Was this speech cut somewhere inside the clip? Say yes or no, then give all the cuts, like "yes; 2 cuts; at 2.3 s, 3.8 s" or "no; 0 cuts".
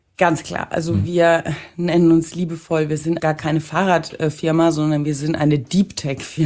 yes; 1 cut; at 3.2 s